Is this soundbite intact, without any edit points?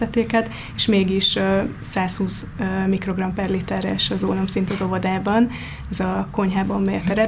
yes; 0 cuts

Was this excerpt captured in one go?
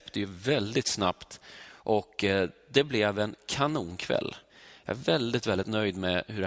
yes; 0 cuts

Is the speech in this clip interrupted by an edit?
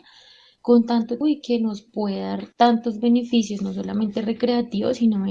yes; 2 cuts; at 1.2 s, 2.5 s

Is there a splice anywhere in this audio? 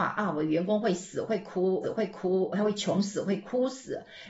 yes; 1 cut; at 1.8 s

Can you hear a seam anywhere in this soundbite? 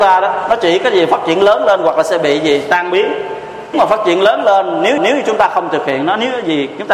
yes; 2 cuts; at 3.7 s, 5.0 s

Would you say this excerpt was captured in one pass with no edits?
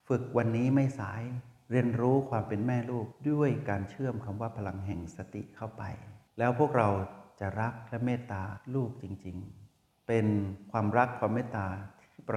no; 1 cut; at 6.3 s

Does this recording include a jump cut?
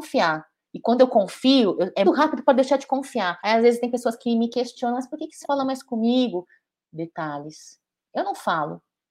yes; 3 cuts; at 2.0 s, 3.4 s, 5.4 s

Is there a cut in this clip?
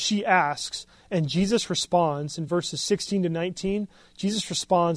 no; 0 cuts

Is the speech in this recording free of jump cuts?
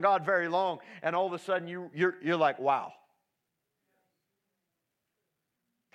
yes; 0 cuts

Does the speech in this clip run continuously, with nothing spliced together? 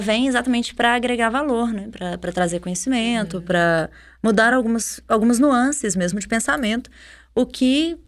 yes; 0 cuts

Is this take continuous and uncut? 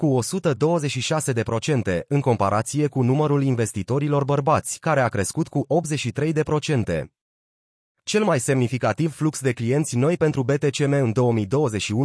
yes; 0 cuts

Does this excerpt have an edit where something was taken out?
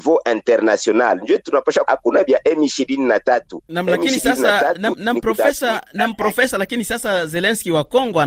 yes; 1 cut; at 1.8 s

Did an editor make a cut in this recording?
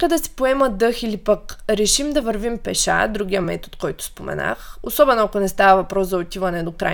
no; 0 cuts

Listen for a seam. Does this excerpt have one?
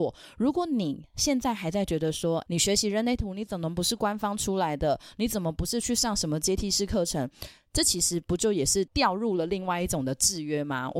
yes; 1 cut; at 2.5 s

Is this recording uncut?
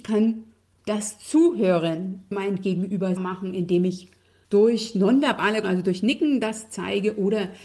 no; 4 cuts; at 2.3 s, 3.2 s, 4.4 s, 5.6 s

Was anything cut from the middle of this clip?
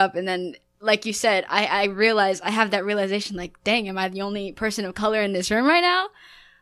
no; 0 cuts

